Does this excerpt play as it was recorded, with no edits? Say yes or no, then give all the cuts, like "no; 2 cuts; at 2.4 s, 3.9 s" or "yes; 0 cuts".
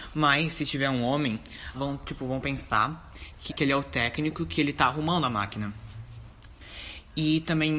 no; 2 cuts; at 1.7 s, 3.5 s